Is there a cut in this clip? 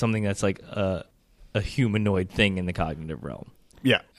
no; 0 cuts

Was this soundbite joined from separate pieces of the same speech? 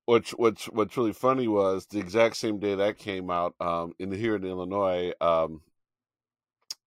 no; 0 cuts

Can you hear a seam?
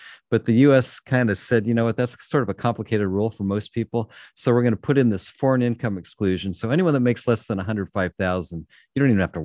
no; 0 cuts

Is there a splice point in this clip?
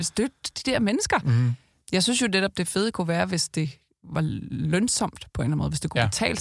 no; 0 cuts

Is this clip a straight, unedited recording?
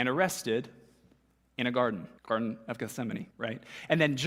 no; 2 cuts; at 2.2 s, 3.3 s

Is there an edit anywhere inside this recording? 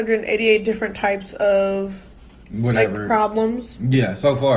yes; 1 cut; at 3.1 s

